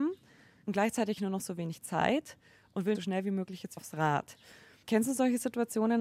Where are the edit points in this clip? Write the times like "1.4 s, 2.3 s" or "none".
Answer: 1.2 s, 2.9 s, 3.8 s